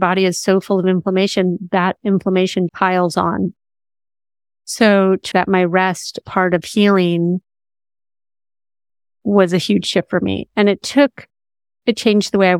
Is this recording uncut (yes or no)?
no